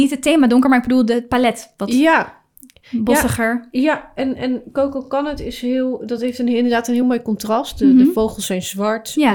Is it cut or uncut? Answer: uncut